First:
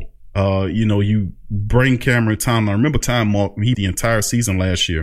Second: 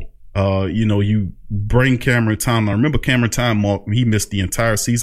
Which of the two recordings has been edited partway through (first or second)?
first